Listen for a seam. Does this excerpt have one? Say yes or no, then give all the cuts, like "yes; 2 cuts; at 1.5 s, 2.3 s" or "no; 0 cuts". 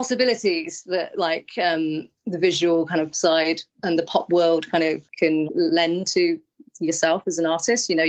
yes; 4 cuts; at 3.1 s, 3.7 s, 5.0 s, 5.5 s